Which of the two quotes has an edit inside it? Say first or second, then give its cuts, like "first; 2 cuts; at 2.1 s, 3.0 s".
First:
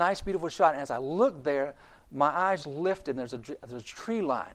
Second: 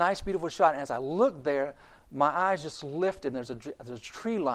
first; 1 cut; at 2.6 s